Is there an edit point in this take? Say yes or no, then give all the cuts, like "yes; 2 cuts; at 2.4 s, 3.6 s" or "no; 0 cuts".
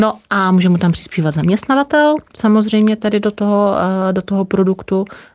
no; 0 cuts